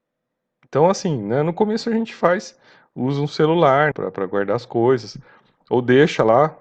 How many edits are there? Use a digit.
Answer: 1